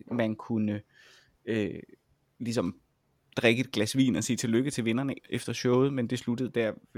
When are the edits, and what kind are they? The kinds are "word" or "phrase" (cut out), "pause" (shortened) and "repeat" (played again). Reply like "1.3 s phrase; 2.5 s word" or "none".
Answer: 5.2 s word